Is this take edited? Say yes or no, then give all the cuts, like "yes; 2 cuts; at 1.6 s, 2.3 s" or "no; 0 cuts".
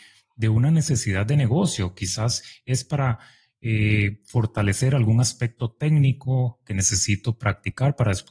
no; 0 cuts